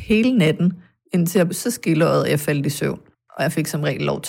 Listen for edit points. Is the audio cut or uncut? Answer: cut